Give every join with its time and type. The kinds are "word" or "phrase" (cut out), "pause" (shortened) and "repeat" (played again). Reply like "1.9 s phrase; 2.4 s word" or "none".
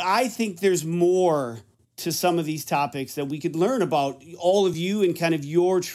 none